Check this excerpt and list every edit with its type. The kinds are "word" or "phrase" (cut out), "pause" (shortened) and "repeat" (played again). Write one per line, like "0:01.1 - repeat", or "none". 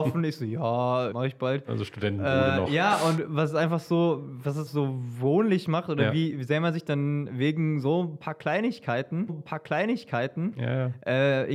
0:01.1 - word
0:04.7 - word
0:09.3 - repeat

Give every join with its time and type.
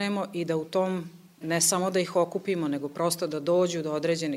0:01.4 - word

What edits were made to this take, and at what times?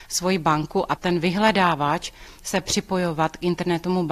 0:01.0 - word

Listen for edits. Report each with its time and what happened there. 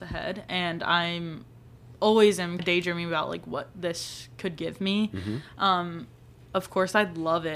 0:02.6 - word

